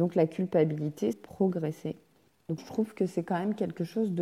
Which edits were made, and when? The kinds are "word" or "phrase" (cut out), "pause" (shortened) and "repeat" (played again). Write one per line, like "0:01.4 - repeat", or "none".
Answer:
0:01.1 - phrase
0:02.6 - word